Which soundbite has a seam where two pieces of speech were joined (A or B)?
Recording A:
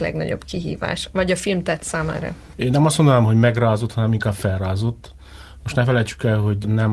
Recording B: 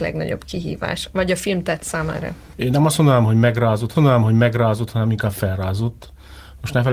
B